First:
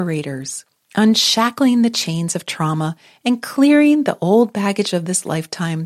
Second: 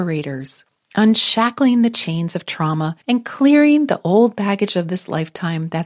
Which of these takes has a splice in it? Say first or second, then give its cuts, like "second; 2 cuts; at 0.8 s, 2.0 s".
second; 1 cut; at 3.0 s